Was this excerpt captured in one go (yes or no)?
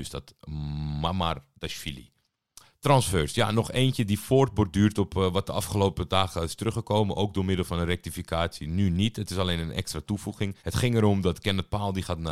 no